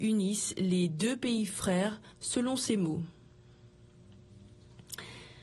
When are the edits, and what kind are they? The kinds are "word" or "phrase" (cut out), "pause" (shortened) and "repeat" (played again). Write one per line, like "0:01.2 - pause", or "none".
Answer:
0:02.1 - pause